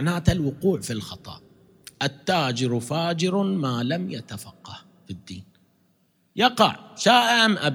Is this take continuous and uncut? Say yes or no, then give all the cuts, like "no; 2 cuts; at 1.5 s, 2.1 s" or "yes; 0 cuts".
yes; 0 cuts